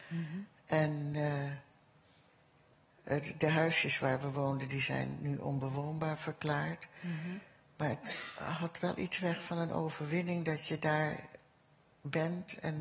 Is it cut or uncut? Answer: uncut